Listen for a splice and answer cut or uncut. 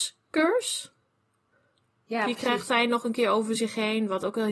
uncut